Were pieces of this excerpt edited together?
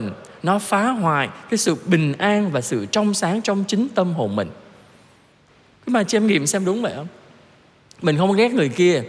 no; 0 cuts

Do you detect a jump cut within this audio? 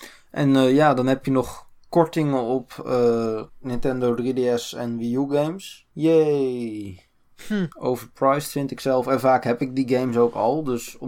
yes; 3 cuts; at 3.5 s, 5.9 s, 7.7 s

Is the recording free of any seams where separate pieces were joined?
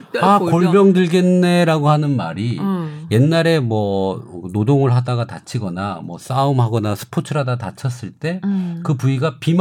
yes; 0 cuts

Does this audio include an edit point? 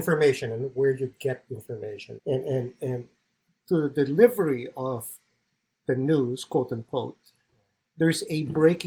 yes; 1 cut; at 2.2 s

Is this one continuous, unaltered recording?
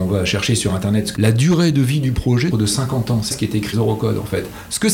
no; 4 cuts; at 1.2 s, 2.5 s, 3.3 s, 3.7 s

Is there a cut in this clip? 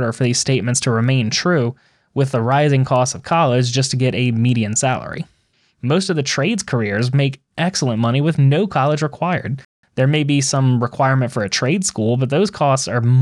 no; 0 cuts

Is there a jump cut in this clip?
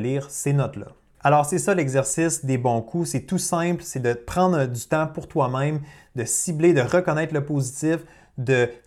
no; 0 cuts

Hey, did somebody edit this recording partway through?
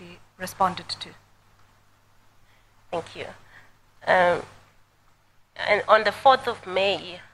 no; 0 cuts

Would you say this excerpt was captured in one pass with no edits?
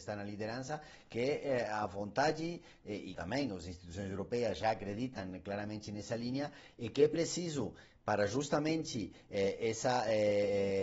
no; 1 cut; at 3.1 s

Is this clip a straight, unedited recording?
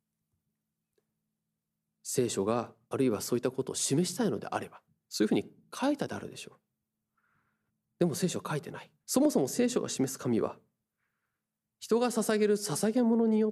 no; 4 cuts; at 2.8 s, 4.9 s, 7.7 s, 9.0 s

